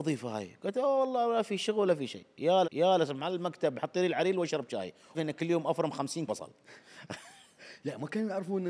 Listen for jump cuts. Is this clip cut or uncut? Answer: cut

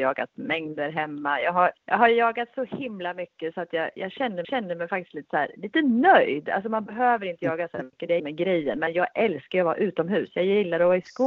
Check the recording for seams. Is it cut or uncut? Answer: cut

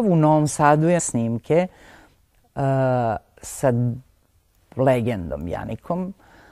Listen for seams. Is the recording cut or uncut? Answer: cut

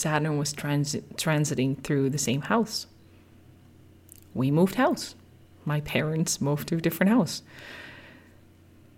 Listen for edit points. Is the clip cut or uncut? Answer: uncut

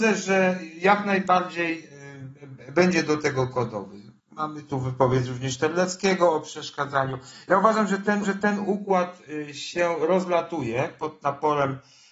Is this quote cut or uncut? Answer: cut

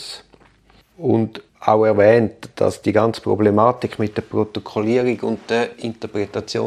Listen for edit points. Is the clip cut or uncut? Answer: cut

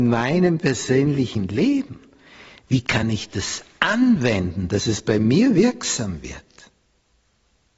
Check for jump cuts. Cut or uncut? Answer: uncut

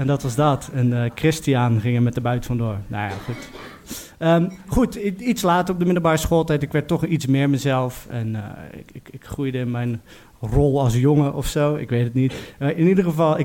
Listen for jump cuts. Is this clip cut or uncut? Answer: uncut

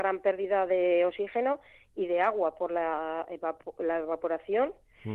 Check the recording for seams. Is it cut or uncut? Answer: uncut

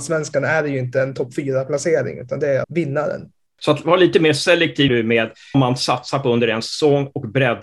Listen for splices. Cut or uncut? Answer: cut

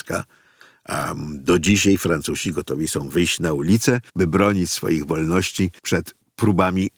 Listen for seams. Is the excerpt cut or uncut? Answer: cut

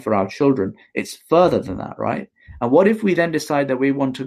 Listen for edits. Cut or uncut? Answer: uncut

